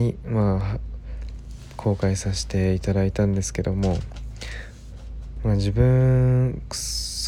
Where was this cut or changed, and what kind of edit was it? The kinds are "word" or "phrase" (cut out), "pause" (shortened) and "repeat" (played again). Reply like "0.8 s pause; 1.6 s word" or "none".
none